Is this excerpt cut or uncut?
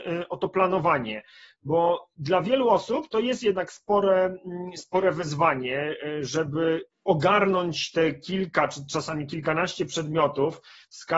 uncut